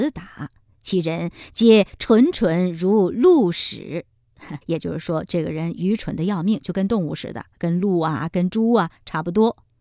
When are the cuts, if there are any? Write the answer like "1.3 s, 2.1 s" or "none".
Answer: 4.6 s